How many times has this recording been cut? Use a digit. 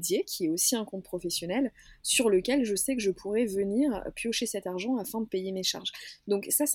0